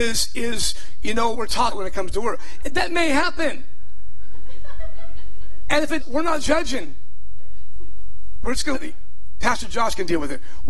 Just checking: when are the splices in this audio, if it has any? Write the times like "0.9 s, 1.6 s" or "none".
1.3 s, 1.7 s, 6.0 s, 8.7 s